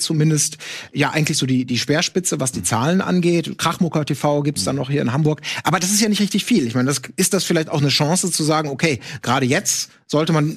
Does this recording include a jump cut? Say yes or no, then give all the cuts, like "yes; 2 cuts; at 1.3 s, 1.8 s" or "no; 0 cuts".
no; 0 cuts